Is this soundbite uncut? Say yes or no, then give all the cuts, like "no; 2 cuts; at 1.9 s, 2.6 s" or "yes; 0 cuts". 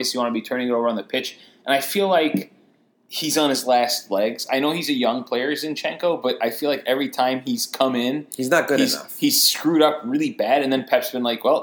yes; 0 cuts